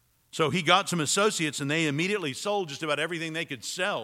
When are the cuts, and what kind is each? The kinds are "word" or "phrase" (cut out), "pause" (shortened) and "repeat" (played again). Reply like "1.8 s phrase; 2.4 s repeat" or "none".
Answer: none